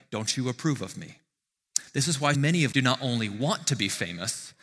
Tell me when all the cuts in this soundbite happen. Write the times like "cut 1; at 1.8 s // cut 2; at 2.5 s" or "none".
cut 1; at 2.3 s // cut 2; at 2.7 s